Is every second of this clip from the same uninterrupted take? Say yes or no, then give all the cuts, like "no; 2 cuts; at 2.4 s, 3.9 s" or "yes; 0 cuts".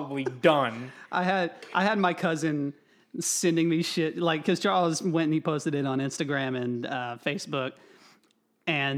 yes; 0 cuts